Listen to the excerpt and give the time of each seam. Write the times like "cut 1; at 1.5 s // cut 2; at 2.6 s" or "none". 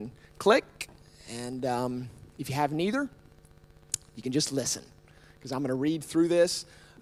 none

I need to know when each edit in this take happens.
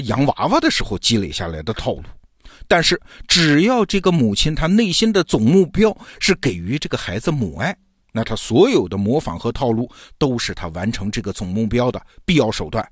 none

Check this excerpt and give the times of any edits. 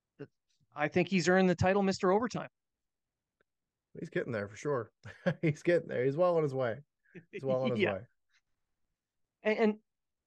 cut 1; at 5.0 s

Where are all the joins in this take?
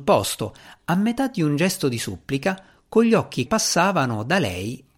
cut 1; at 3.5 s

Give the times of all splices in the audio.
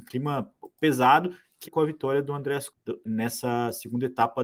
cut 1; at 1.6 s // cut 2; at 2.7 s // cut 3; at 3.1 s

